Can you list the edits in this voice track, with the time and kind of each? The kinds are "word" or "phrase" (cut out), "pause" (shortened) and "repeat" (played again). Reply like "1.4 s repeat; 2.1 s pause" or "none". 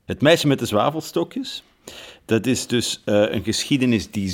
none